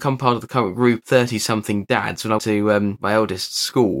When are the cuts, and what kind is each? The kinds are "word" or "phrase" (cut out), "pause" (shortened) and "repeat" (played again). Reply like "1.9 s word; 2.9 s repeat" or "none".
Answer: 1.0 s word; 2.4 s word